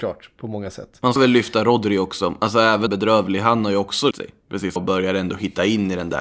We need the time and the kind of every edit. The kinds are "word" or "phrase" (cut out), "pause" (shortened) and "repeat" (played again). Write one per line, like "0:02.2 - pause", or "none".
0:01.2 - word
0:02.9 - phrase
0:04.1 - word
0:04.8 - phrase